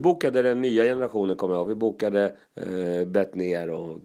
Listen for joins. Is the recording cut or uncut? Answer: cut